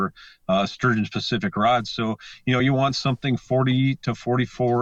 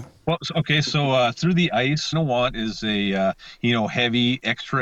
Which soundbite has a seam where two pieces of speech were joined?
second; 1 cut; at 2.1 s

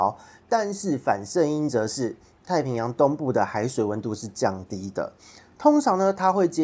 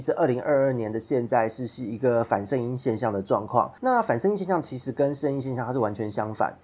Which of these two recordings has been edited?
second; 1 cut; at 3.8 s

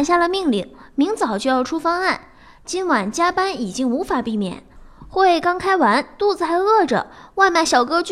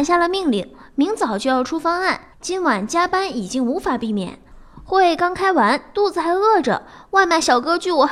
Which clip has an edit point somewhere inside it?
second; 1 cut; at 2.3 s

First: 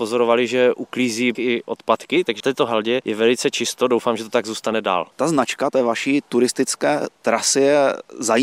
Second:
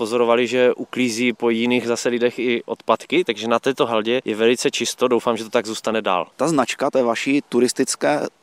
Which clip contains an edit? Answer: first; 2 cuts; at 1.3 s, 2.4 s

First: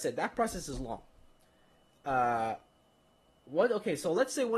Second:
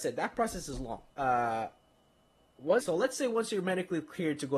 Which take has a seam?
second; 2 cuts; at 1.1 s, 2.8 s

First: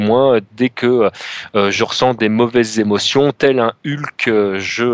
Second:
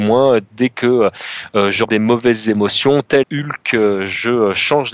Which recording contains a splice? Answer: second; 2 cuts; at 1.8 s, 3.2 s

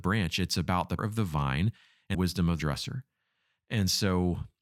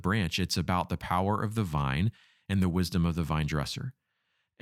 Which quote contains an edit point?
first; 3 cuts; at 1.0 s, 2.1 s, 2.6 s

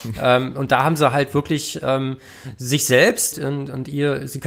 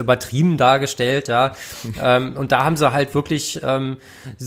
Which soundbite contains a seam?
first; 1 cut; at 3.3 s

